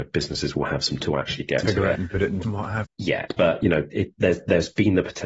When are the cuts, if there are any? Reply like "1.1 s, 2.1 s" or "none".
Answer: 1.0 s, 1.6 s, 1.9 s, 2.4 s, 2.8 s, 3.3 s, 3.9 s